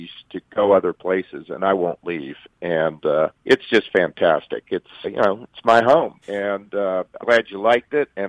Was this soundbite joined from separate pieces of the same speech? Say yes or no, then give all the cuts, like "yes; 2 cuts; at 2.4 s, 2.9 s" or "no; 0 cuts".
yes; 4 cuts; at 3.4 s, 5.0 s, 6.2 s, 7.2 s